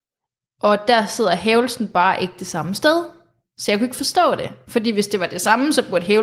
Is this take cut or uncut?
uncut